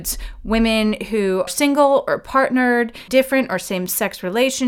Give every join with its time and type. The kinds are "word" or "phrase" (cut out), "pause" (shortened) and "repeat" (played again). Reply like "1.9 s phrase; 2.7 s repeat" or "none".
1.5 s word; 3.1 s word